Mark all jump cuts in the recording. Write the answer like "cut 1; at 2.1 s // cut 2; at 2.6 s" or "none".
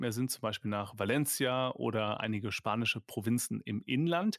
none

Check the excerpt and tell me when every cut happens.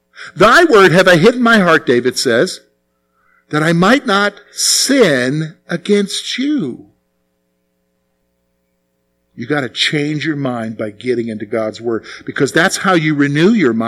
none

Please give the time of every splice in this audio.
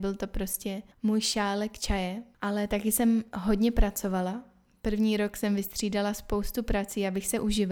cut 1; at 0.9 s

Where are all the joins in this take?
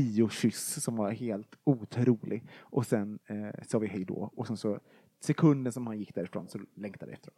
none

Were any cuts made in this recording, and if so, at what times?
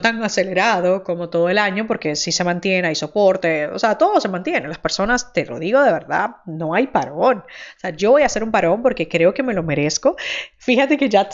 none

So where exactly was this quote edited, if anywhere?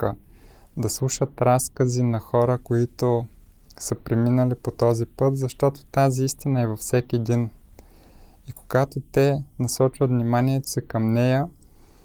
none

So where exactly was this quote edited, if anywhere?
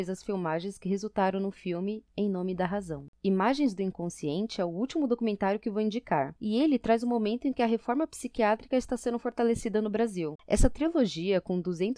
cut 1; at 6.4 s

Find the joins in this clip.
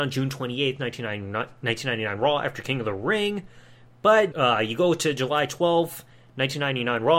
cut 1; at 4.3 s

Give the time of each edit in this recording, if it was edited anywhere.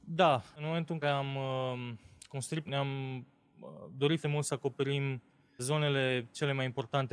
cut 1; at 1.0 s // cut 2; at 2.7 s // cut 3; at 4.2 s // cut 4; at 5.6 s

